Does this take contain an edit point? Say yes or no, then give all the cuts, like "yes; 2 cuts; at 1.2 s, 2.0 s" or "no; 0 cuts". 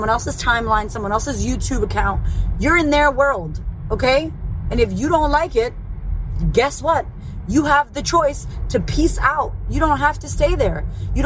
no; 0 cuts